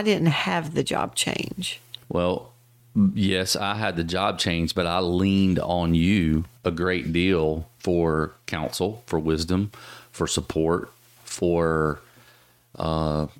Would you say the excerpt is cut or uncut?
cut